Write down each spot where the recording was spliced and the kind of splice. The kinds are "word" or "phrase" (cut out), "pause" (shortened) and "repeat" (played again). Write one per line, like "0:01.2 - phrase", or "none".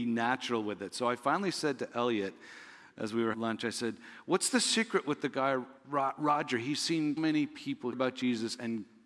0:03.3 - word
0:05.8 - pause
0:07.2 - word
0:07.9 - word